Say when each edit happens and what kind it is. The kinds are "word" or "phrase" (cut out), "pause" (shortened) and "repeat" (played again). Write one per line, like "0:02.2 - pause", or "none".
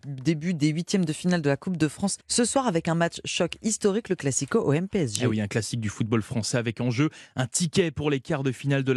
0:02.2 - pause